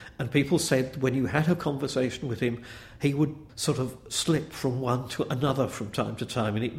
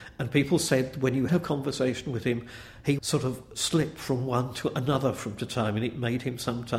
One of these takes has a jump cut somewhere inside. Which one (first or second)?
second